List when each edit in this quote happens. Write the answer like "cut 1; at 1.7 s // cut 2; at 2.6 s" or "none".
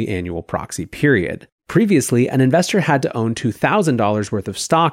cut 1; at 1.6 s

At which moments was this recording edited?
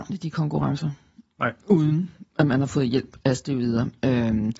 cut 1; at 2.3 s

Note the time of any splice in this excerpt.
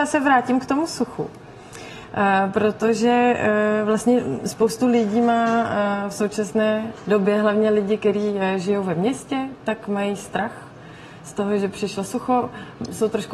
none

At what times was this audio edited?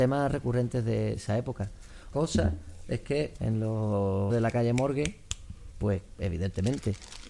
cut 1; at 1.2 s // cut 2; at 2.1 s // cut 3; at 3.4 s // cut 4; at 4.3 s // cut 5; at 5.7 s

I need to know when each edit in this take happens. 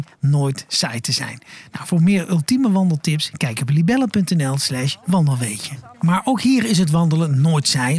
cut 1; at 5.9 s

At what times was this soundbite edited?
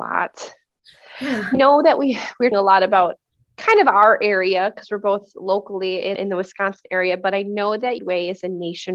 cut 1; at 1.5 s // cut 2; at 2.5 s // cut 3; at 6.2 s // cut 4; at 8.0 s

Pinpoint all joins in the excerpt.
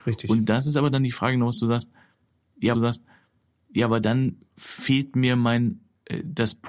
cut 1; at 2.7 s

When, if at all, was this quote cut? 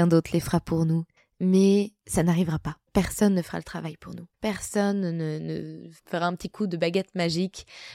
cut 1; at 1.2 s // cut 2; at 2.9 s // cut 3; at 4.3 s // cut 4; at 6.0 s

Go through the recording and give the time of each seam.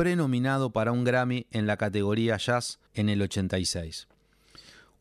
cut 1; at 2.9 s

